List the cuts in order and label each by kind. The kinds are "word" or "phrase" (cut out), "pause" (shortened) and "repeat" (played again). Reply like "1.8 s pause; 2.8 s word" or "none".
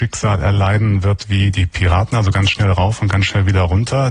none